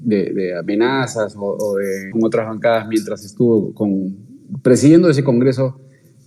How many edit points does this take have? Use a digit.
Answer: 1